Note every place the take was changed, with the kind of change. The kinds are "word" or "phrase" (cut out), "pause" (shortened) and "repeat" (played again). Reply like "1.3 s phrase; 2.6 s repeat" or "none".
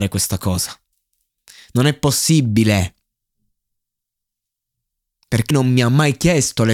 5.5 s word